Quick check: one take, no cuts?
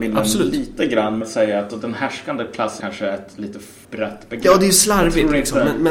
no; 4 cuts; at 1.2 s, 1.7 s, 2.8 s, 3.8 s

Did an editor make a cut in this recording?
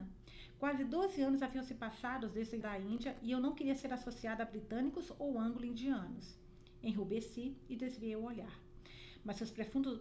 yes; 1 cut; at 2.6 s

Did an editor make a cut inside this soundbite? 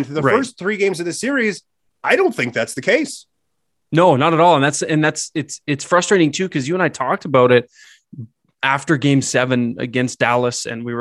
no; 0 cuts

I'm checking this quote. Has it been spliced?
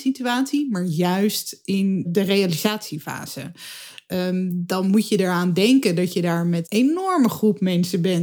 yes; 2 cuts; at 2.0 s, 6.6 s

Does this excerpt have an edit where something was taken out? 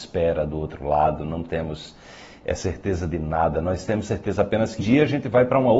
yes; 1 cut; at 4.8 s

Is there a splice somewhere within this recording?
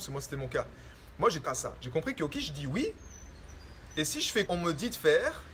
yes; 3 cuts; at 1.4 s, 2.4 s, 4.5 s

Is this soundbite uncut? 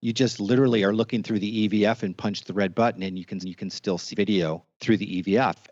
no; 3 cuts; at 3.4 s, 4.1 s, 4.7 s

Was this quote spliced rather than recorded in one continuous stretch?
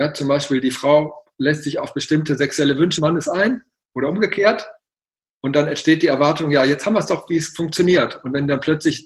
yes; 1 cut; at 3.0 s

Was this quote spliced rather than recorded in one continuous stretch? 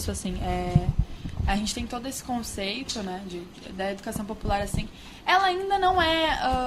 no; 0 cuts

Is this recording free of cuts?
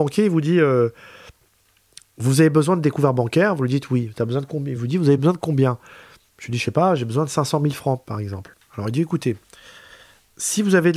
yes; 0 cuts

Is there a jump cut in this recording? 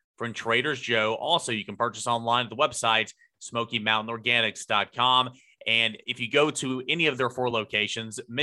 no; 0 cuts

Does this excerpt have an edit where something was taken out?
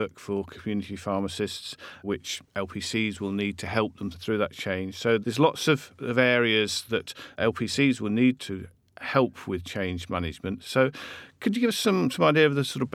no; 0 cuts

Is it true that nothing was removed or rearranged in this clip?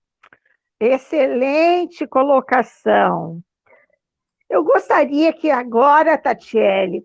yes; 0 cuts

